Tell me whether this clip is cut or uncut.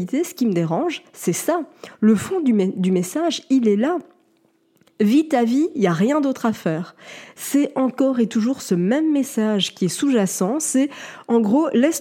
uncut